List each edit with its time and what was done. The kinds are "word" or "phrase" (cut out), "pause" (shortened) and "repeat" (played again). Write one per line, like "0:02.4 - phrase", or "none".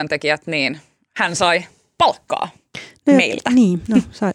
none